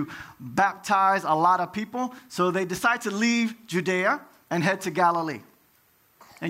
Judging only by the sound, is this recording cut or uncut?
uncut